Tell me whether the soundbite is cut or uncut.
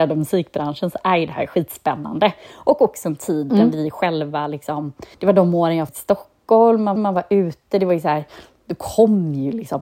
cut